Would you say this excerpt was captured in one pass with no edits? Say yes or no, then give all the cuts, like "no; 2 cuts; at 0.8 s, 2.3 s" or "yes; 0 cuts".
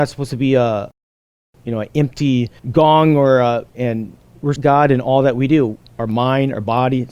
no; 3 cuts; at 2.6 s, 3.7 s, 4.6 s